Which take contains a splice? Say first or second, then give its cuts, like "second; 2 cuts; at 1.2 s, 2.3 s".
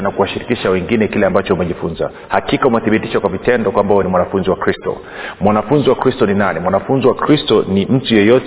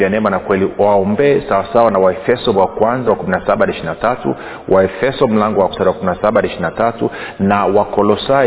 second; 3 cuts; at 2.5 s, 3.1 s, 5.7 s